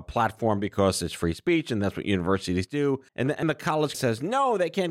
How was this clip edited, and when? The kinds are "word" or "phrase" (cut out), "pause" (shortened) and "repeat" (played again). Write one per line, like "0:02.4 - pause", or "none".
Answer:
0:03.1 - pause
0:03.4 - word
0:03.9 - word

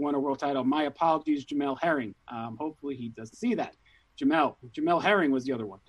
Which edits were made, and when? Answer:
0:03.3 - word

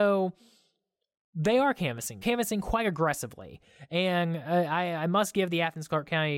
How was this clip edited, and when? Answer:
0:02.2 - phrase

